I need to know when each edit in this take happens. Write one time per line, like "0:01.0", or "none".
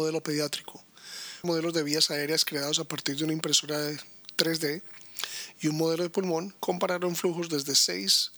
0:01.4
0:06.6

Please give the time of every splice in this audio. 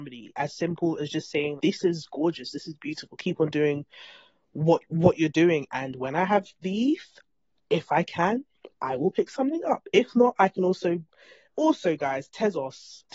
0:01.6
0:08.7

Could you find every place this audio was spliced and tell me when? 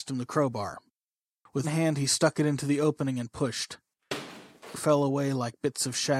0:01.6
0:04.7

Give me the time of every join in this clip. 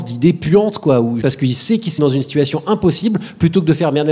0:01.2
0:02.0

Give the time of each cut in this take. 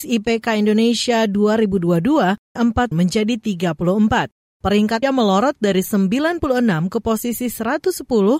0:02.6
0:02.9
0:05.0

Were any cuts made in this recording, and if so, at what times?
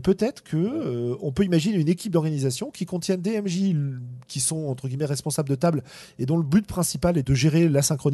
0:07.2

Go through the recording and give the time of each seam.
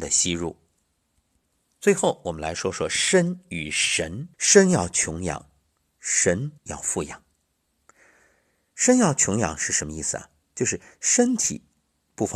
0:04.3
0:06.6

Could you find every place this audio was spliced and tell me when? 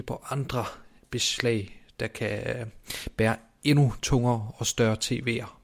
none

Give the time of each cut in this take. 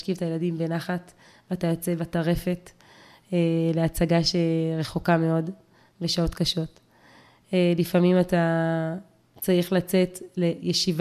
none

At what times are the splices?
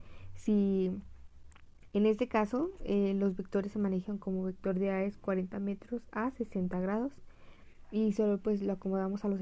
none

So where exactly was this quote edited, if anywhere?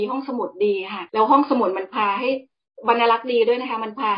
0:01.1

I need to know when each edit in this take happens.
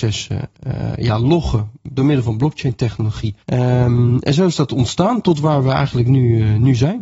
0:03.4

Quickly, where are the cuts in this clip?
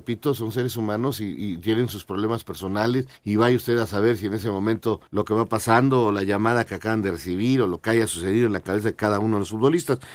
0:03.2
0:05.1

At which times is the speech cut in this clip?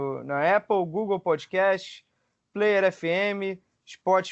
none

